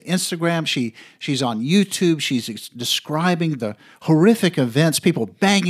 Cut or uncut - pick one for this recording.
uncut